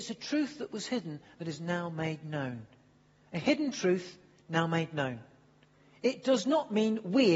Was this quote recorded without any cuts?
yes; 0 cuts

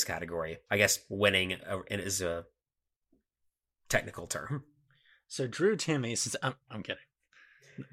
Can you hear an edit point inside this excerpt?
no; 0 cuts

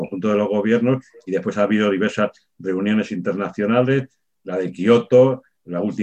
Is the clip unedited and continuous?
yes; 0 cuts

